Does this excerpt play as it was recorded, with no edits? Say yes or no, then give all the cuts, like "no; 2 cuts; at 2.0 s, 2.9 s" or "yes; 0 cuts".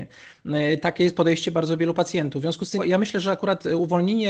no; 1 cut; at 2.8 s